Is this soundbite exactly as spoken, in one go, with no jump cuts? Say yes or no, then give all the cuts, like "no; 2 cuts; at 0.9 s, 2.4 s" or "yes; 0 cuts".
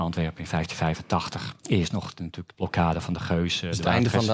no; 2 cuts; at 1.6 s, 2.5 s